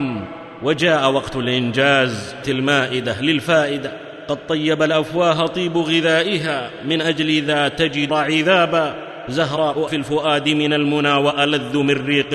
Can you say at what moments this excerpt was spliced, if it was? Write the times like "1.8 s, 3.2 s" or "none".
2.4 s, 8.1 s, 9.9 s